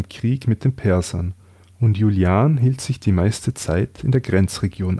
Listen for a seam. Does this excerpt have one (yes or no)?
no